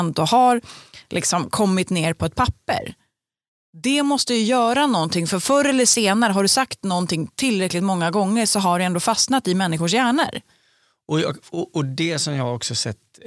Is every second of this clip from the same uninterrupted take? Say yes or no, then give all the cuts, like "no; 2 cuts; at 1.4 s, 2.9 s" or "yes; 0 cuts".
yes; 0 cuts